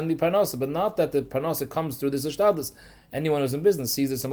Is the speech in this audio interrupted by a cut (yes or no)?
no